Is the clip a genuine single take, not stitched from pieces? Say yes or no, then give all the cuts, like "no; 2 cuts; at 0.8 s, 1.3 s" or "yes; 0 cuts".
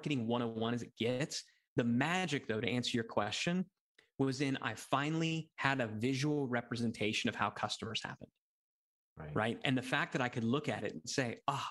yes; 0 cuts